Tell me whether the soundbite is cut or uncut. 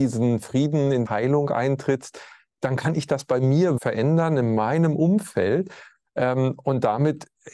cut